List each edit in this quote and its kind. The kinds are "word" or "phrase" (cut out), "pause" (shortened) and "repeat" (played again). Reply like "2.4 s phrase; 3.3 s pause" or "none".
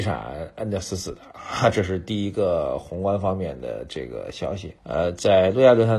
4.8 s pause